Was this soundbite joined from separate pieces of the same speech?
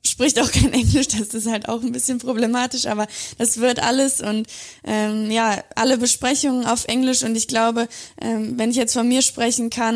no; 0 cuts

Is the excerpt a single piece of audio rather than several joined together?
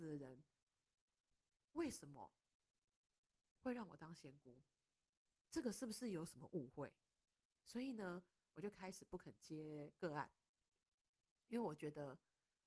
yes; 0 cuts

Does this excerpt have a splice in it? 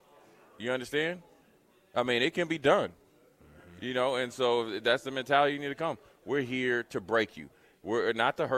no; 0 cuts

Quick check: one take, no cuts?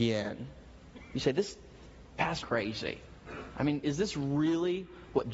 no; 1 cut; at 2.4 s

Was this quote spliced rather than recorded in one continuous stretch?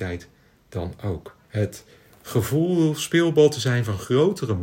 yes; 1 cut; at 1.4 s

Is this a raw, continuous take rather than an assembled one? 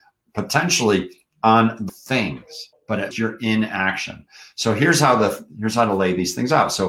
no; 3 cuts; at 1.9 s, 2.7 s, 3.1 s

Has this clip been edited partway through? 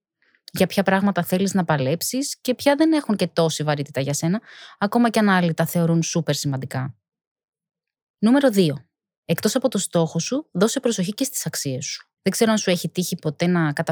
yes; 1 cut; at 12.2 s

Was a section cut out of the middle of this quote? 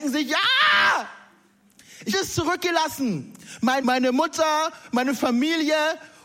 yes; 2 cuts; at 2.1 s, 3.8 s

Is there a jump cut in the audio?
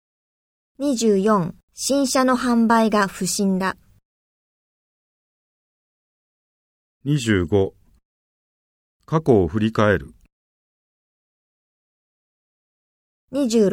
yes; 1 cut; at 1.6 s

